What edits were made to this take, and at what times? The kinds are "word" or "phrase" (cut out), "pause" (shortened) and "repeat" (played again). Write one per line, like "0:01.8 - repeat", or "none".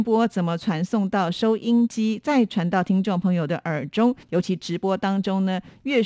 0:04.2 - pause